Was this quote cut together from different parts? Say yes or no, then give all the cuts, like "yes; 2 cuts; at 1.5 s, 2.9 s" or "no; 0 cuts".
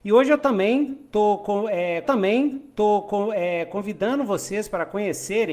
yes; 1 cut; at 2.0 s